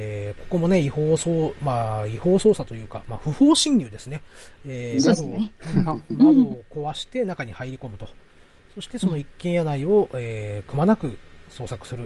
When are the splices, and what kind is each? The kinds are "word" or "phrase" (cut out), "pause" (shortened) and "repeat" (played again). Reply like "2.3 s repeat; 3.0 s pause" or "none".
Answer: none

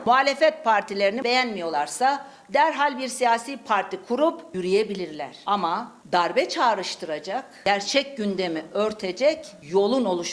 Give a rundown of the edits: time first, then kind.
none

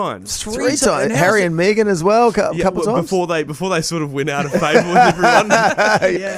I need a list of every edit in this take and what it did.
none

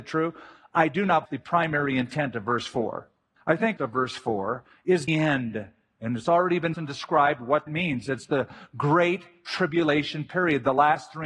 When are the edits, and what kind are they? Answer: 1.3 s phrase; 3.4 s pause; 3.8 s phrase; 5.1 s phrase; 6.7 s word; 7.7 s word

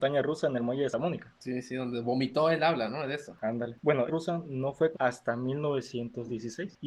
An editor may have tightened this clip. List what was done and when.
0.9 s word; 4.1 s phrase; 4.9 s word

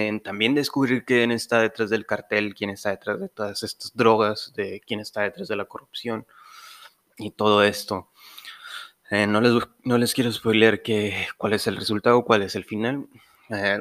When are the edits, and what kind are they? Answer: none

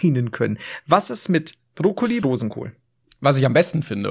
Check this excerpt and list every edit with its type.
2.2 s phrase

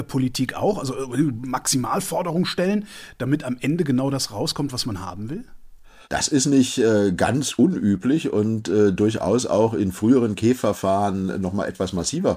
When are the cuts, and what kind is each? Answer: 6.0 s pause

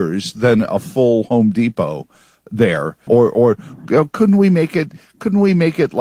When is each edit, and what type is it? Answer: 3.1 s word

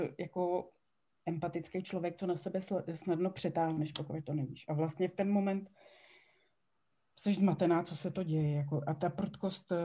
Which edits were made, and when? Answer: none

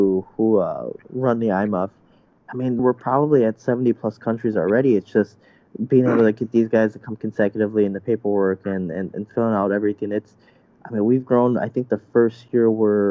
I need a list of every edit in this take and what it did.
2.8 s word

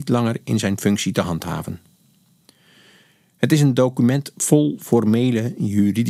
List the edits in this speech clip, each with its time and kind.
none

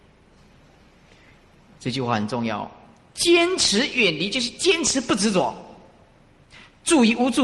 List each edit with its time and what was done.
none

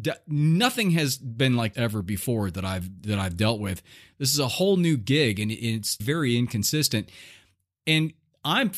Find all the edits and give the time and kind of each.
1.7 s word; 6.0 s word

